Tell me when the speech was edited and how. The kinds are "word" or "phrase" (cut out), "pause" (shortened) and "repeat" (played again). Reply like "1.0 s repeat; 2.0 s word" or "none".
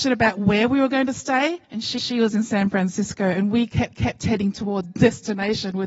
1.6 s pause; 2.0 s repeat; 3.9 s repeat; 4.8 s word

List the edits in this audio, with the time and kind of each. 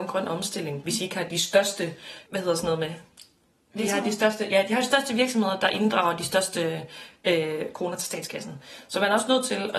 none

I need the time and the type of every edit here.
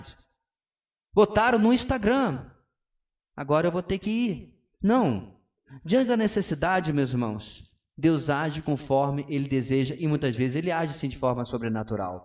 none

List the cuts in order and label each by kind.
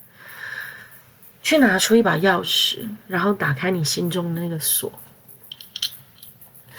none

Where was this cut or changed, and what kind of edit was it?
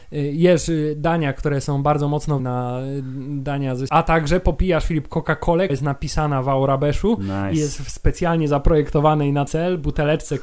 2.4 s word; 3.9 s phrase; 5.7 s word; 9.5 s word

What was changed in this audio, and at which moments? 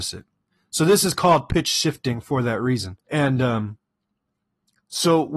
3.0 s pause

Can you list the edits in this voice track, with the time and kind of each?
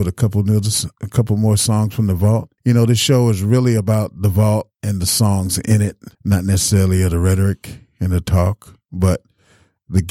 2.6 s pause; 4.7 s pause; 6.1 s pause

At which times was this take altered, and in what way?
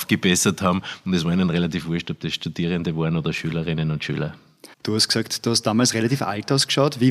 4.7 s pause

